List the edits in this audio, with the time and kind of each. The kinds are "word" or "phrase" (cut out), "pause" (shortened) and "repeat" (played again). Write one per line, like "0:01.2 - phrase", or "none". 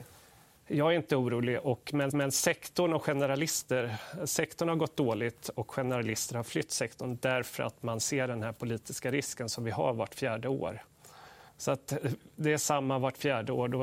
0:02.1 - repeat
0:11.5 - pause